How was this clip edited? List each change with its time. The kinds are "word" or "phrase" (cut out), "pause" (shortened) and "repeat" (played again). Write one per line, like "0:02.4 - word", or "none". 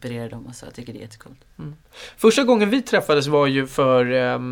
none